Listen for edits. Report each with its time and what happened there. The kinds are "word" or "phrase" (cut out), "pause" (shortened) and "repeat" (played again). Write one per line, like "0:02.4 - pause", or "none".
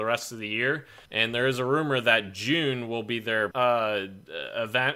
0:01.1 - pause
0:03.5 - word

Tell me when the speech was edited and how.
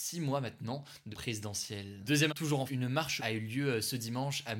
0:01.1 - word
0:02.3 - word
0:02.7 - word
0:03.2 - word

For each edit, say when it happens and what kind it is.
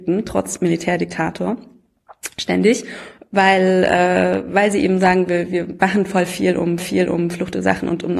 0:06.8 - repeat

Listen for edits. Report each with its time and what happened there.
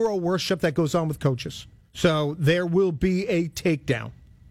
0:01.8 - pause

